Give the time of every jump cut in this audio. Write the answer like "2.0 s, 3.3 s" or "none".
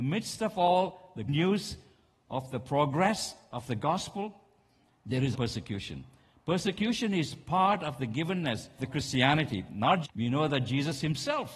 1.3 s, 5.3 s, 8.8 s, 10.0 s